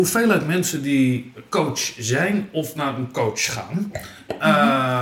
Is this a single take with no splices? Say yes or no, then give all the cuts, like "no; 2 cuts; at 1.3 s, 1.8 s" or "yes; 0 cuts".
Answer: yes; 0 cuts